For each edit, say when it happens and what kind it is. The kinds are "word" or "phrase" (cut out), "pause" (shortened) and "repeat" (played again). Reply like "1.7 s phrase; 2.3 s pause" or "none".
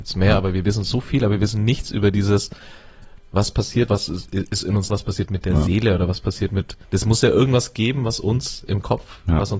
3.9 s word; 4.9 s word; 6.8 s pause